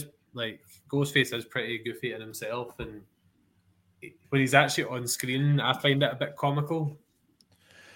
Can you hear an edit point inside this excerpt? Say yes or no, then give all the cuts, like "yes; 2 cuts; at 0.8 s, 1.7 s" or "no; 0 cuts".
yes; 1 cut; at 4.2 s